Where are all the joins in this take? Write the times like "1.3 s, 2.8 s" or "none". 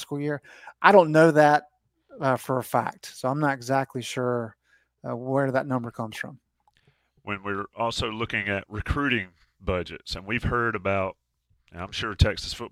none